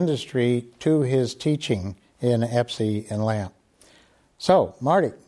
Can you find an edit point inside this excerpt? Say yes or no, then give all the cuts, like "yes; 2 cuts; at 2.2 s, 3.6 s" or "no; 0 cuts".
no; 0 cuts